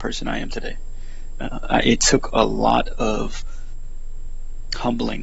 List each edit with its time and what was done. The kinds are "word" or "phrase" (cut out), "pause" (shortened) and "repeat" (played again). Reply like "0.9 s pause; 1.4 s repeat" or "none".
none